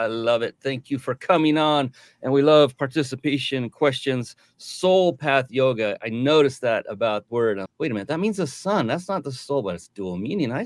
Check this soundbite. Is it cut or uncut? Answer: cut